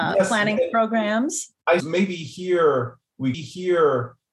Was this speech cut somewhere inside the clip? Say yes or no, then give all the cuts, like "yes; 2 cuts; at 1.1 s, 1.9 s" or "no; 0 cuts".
yes; 2 cuts; at 1.8 s, 3.3 s